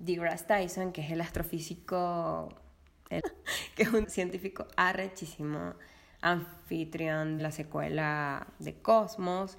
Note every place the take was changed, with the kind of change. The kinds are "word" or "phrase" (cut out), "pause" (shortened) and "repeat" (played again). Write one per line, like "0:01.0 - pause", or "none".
0:03.2 - word
0:04.0 - word
0:07.4 - word